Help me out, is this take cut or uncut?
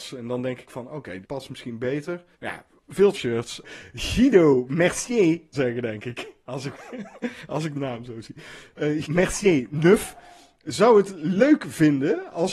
cut